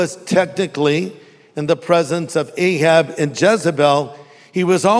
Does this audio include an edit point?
no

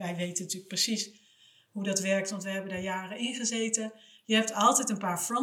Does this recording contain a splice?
no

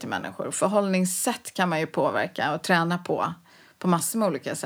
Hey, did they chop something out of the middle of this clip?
no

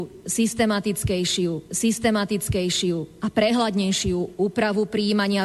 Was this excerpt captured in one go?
no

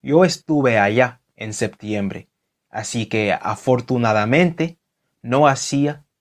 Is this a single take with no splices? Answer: yes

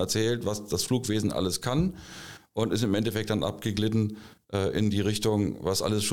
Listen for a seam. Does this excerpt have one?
no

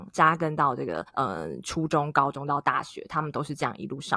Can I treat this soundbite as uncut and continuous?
no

